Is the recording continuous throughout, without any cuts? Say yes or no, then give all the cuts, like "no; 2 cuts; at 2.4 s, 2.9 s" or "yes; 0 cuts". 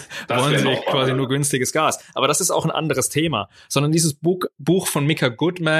yes; 0 cuts